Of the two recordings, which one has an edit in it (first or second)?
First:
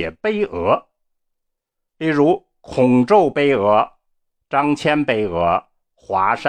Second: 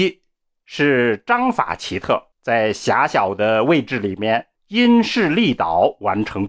second